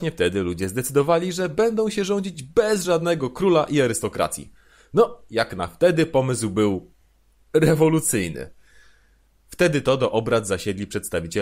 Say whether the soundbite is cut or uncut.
uncut